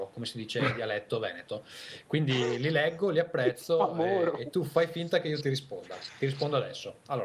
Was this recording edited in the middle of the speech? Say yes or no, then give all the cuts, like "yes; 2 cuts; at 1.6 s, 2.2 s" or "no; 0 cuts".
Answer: no; 0 cuts